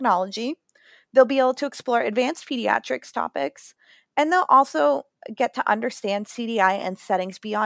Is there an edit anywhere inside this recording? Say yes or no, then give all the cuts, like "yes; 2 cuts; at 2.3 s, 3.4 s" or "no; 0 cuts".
no; 0 cuts